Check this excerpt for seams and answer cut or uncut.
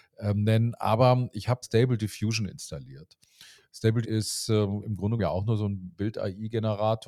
cut